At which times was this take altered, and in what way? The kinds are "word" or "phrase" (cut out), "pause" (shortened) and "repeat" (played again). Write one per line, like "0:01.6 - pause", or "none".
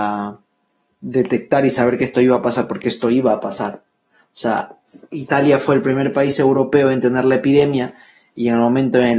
none